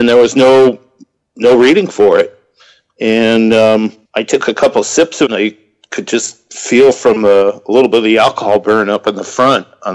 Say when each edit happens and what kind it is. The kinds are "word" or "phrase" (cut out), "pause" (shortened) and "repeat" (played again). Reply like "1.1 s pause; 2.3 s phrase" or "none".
4.1 s pause; 5.3 s word